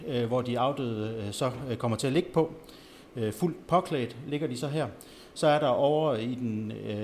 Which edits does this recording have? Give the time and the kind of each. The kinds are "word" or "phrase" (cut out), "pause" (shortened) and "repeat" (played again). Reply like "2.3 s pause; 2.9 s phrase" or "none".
none